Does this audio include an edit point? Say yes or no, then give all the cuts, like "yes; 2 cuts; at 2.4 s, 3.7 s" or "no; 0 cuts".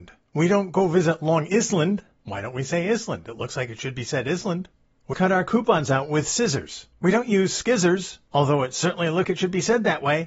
yes; 2 cuts; at 5.1 s, 9.2 s